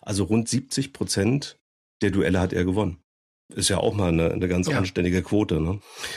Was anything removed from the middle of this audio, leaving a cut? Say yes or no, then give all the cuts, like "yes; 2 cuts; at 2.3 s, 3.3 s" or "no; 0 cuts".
no; 0 cuts